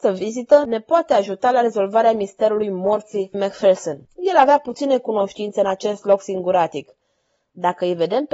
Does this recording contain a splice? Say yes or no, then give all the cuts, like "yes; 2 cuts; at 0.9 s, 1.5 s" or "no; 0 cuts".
yes; 2 cuts; at 3.3 s, 4.1 s